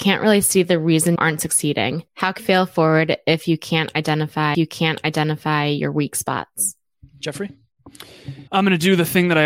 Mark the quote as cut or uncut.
cut